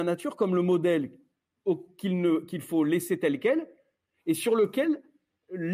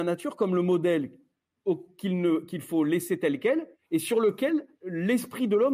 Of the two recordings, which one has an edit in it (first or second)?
second